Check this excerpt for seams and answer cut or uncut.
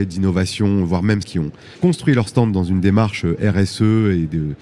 cut